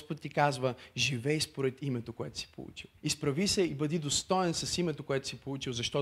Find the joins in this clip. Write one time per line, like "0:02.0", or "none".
0:03.0